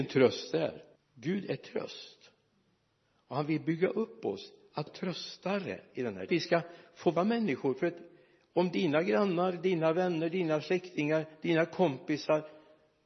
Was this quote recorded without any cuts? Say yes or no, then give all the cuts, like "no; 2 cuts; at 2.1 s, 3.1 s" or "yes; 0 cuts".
no; 4 cuts; at 1.0 s, 4.9 s, 6.3 s, 7.2 s